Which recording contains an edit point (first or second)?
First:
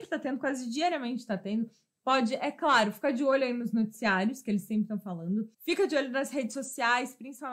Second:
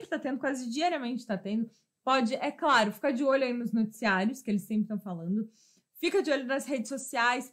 first